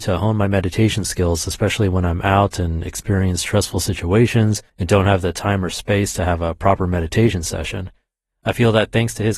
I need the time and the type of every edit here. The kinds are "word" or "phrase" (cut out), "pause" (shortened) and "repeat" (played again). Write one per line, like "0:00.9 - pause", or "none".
0:04.7 - pause